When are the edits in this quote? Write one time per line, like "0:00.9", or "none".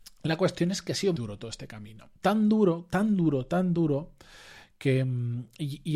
0:01.2
0:02.2